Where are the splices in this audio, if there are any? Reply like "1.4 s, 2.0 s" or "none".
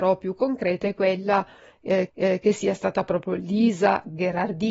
2.1 s